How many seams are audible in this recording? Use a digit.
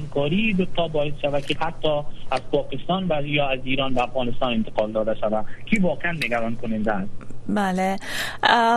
2